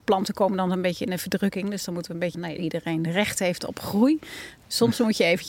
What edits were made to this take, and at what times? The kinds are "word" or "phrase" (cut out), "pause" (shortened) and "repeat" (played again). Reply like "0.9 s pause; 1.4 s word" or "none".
2.3 s phrase